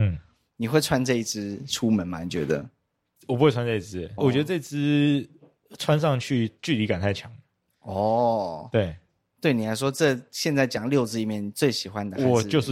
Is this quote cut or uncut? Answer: cut